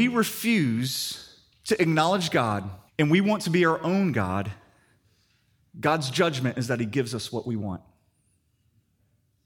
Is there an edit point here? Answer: yes; 1 cut; at 2.9 s

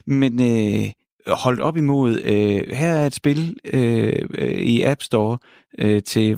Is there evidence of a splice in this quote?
no; 0 cuts

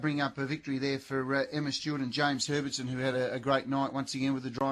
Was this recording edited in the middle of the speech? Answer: no; 0 cuts

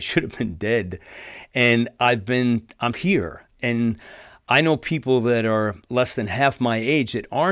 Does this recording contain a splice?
yes; 3 cuts; at 2.9 s, 3.6 s, 5.8 s

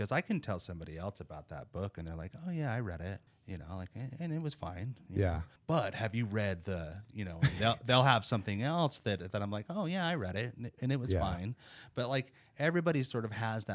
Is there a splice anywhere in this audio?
yes; 2 cuts; at 3.3 s, 5.6 s

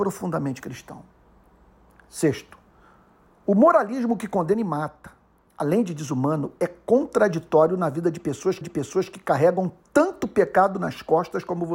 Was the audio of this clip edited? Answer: yes; 2 cuts; at 5.3 s, 8.6 s

